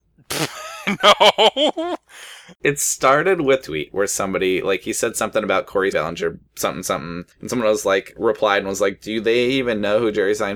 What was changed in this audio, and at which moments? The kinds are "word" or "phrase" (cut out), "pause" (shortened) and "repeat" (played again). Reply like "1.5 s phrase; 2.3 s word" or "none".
3.6 s phrase; 5.9 s phrase; 6.5 s pause; 7.3 s pause